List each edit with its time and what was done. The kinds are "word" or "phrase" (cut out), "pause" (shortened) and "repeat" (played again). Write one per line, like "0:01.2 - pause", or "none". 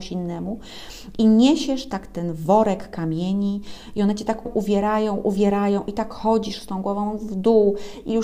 0:04.5 - word